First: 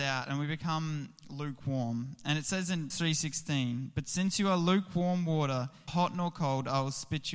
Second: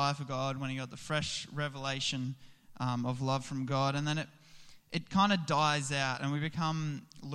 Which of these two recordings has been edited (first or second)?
first